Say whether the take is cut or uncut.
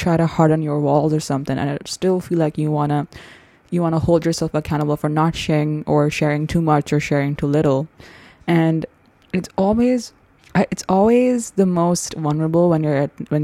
uncut